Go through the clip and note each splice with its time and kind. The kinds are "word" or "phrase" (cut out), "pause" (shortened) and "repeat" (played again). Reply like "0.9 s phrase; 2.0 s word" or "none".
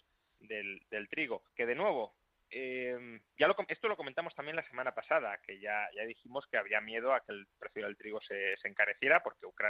1.5 s pause; 3.3 s pause